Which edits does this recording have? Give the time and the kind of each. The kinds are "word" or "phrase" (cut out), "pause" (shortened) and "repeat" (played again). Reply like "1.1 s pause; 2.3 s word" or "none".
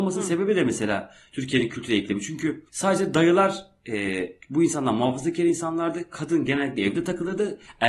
2.7 s pause; 4.4 s pause